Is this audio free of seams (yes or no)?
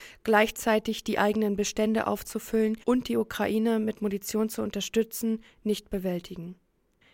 no